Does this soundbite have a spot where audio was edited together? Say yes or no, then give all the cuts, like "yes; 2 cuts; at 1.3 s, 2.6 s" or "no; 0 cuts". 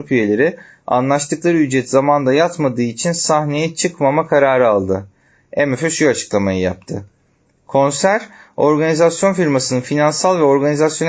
no; 0 cuts